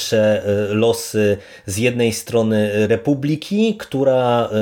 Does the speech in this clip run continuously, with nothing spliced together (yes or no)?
yes